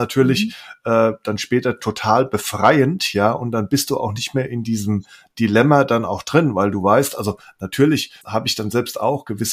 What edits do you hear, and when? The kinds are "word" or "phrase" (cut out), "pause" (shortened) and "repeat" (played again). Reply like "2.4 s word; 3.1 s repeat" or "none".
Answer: 8.2 s pause